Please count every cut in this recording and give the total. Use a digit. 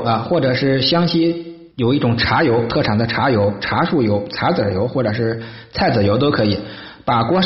1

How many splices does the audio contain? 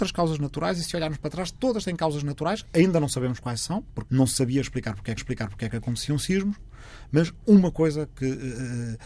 2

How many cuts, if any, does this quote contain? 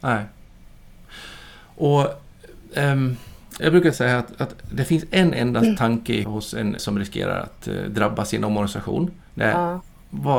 4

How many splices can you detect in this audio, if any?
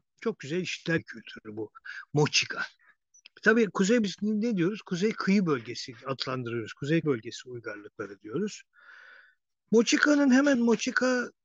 4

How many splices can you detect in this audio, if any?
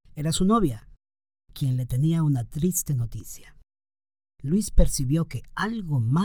0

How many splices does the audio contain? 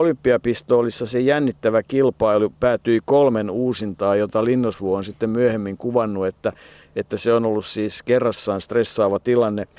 0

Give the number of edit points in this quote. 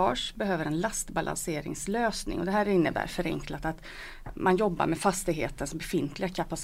0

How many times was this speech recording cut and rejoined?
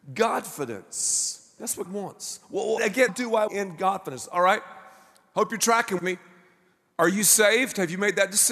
5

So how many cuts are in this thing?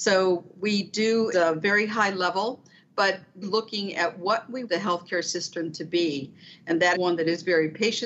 4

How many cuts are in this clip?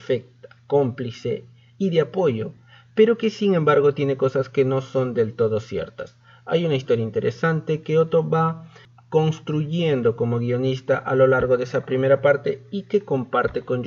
0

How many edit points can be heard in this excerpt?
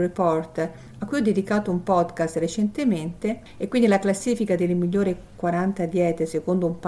0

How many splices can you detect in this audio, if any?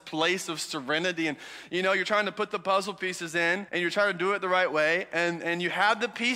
1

